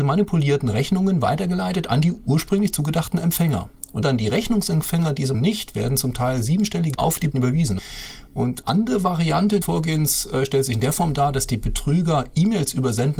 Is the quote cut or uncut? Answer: cut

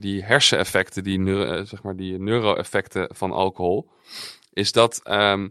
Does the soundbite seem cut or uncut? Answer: uncut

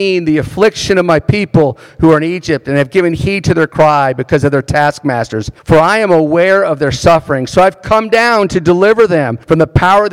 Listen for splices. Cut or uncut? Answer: uncut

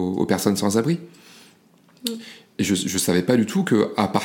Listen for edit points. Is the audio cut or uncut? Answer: uncut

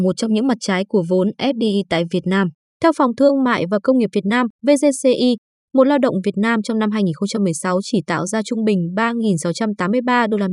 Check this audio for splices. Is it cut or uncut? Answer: cut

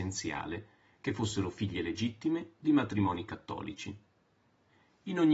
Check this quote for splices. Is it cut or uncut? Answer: uncut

